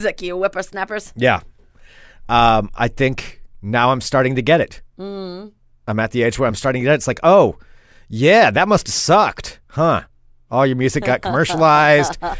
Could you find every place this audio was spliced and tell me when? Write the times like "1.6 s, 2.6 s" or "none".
none